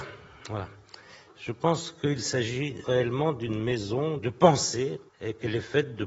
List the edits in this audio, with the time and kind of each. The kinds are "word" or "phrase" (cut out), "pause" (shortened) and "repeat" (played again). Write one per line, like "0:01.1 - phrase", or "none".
0:02.8 - word
0:04.2 - word
0:05.1 - pause